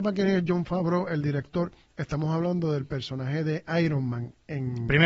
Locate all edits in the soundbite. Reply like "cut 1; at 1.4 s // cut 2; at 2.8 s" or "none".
none

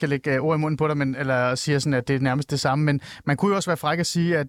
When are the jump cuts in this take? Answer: cut 1; at 2.1 s

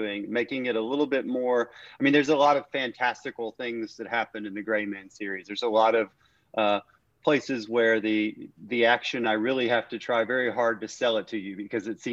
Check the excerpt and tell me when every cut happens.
none

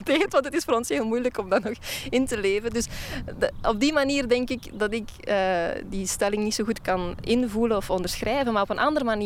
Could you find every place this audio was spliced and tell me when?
none

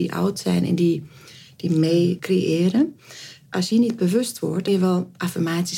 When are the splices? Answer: cut 1; at 2.2 s // cut 2; at 3.7 s // cut 3; at 4.7 s

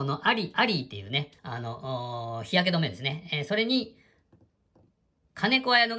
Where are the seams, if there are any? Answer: cut 1; at 1.4 s

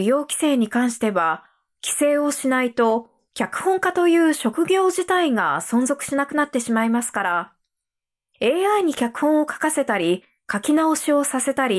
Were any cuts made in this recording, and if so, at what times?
none

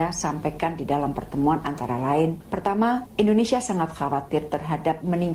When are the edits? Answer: none

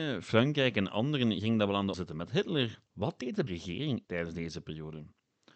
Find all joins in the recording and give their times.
cut 1; at 1.9 s // cut 2; at 2.9 s // cut 3; at 3.5 s // cut 4; at 4.0 s

